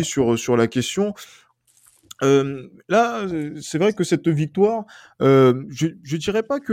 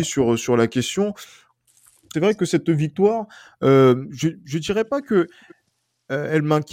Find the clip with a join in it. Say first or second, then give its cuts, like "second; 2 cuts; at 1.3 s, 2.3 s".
second; 1 cut; at 2.1 s